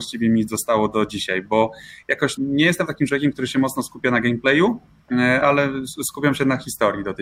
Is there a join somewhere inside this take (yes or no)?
yes